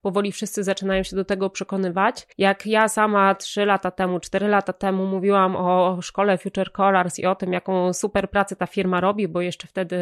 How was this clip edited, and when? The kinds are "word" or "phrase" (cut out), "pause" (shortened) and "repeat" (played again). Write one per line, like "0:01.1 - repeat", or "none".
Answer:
0:02.3 - pause